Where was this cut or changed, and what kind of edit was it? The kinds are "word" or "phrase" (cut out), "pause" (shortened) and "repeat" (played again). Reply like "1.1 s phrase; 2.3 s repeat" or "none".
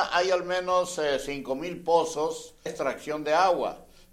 2.7 s word